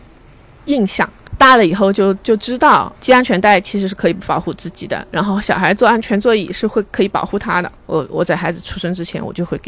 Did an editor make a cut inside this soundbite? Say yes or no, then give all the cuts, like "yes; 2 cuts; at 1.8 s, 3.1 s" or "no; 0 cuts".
yes; 1 cut; at 7.8 s